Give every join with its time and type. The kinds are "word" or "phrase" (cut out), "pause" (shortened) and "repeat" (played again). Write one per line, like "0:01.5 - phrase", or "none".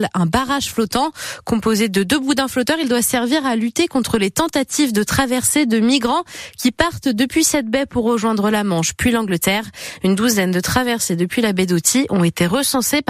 none